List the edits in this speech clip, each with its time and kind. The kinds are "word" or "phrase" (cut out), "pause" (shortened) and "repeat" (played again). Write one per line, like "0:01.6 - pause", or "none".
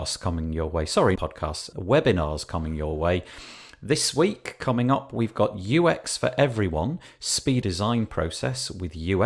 0:01.2 - word
0:01.7 - word
0:07.6 - phrase